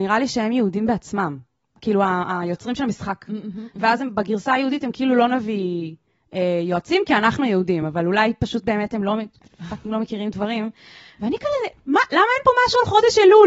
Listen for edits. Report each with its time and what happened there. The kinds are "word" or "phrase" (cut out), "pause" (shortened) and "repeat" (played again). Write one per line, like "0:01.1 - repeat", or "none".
none